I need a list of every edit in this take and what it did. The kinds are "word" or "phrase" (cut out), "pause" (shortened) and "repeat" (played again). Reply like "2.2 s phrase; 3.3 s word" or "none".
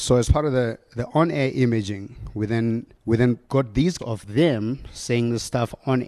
2.9 s pause; 3.4 s pause; 4.0 s word